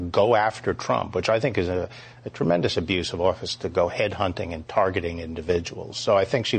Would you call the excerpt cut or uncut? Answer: uncut